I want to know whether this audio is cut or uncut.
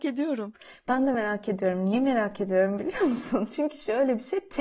uncut